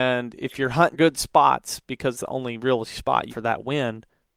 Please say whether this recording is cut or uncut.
cut